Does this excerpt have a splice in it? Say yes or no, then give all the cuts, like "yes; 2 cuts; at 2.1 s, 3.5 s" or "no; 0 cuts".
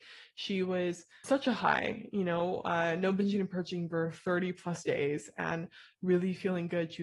yes; 1 cut; at 1.2 s